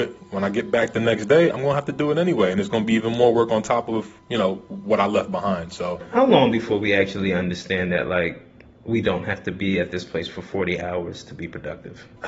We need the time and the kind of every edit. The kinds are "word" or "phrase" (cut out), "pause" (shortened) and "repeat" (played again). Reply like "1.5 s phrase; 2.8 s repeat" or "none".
none